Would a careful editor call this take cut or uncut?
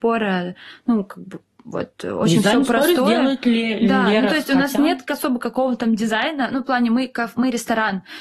uncut